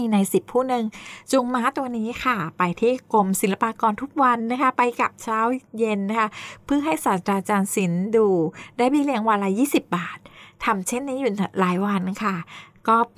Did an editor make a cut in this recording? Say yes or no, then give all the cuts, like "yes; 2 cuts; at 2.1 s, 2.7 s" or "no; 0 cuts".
no; 0 cuts